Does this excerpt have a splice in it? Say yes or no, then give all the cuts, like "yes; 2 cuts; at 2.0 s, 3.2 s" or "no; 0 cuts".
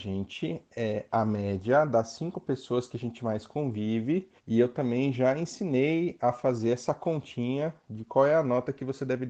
yes; 1 cut; at 4.4 s